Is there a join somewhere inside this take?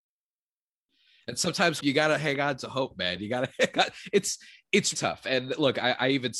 yes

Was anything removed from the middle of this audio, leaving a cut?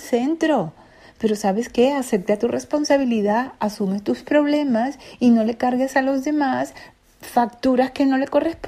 no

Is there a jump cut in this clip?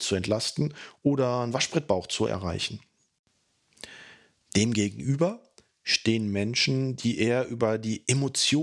no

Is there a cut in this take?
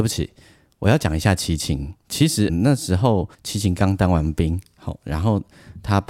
yes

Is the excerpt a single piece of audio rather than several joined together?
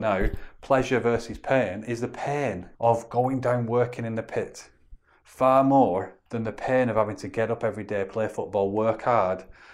no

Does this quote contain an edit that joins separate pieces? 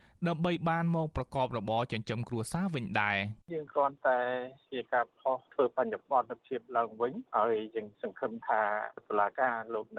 yes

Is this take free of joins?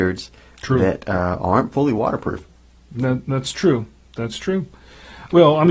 yes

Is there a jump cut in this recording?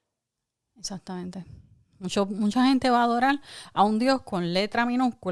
no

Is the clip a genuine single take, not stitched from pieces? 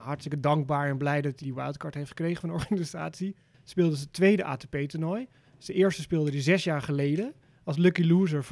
no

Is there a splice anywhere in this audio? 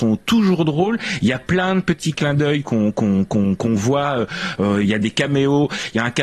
no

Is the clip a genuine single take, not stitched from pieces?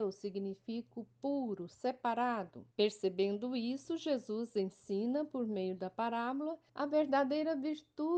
no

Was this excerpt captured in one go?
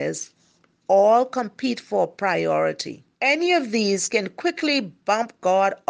no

